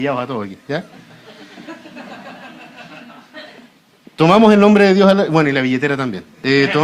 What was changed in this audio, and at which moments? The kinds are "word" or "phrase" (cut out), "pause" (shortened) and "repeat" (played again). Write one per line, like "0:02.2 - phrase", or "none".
none